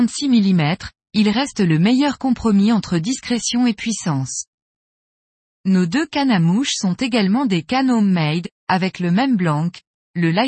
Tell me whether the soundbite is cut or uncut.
uncut